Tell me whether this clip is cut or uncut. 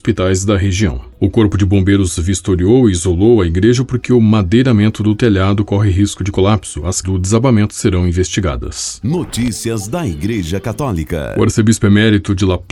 cut